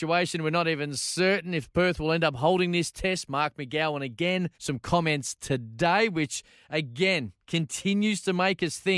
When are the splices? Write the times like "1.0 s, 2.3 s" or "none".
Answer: 4.5 s, 7.4 s